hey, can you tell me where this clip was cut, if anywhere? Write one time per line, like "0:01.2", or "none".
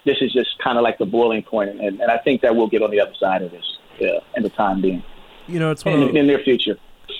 none